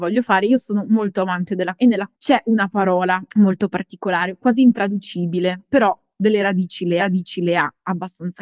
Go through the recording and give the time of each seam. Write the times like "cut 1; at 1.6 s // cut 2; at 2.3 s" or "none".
cut 1; at 1.8 s // cut 2; at 2.1 s // cut 3; at 3.3 s // cut 4; at 7.0 s

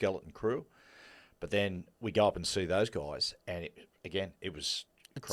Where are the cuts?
none

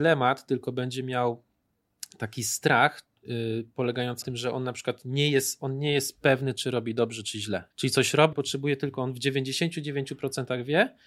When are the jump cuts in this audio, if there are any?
cut 1; at 4.2 s // cut 2; at 7.7 s // cut 3; at 8.3 s

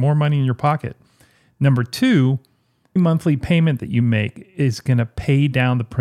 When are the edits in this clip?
cut 1; at 3.0 s

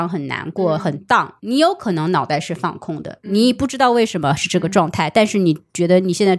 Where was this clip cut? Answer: cut 1; at 1.4 s

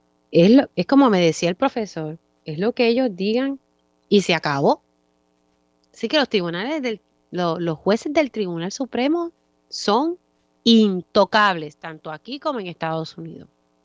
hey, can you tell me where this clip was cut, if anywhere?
none

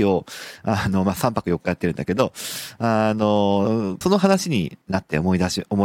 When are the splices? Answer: cut 1; at 4.0 s // cut 2; at 4.8 s

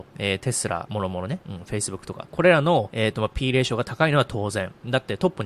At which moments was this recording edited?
none

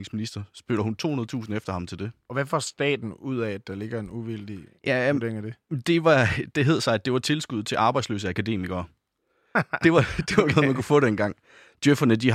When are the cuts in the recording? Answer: none

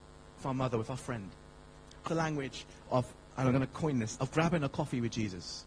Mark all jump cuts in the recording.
cut 1; at 2.1 s // cut 2; at 2.8 s // cut 3; at 4.2 s

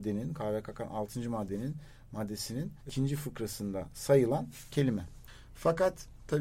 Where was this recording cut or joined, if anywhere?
cut 1; at 2.8 s // cut 2; at 4.7 s

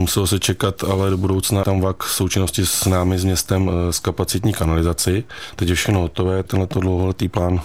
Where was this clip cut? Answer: cut 1; at 1.6 s // cut 2; at 6.5 s

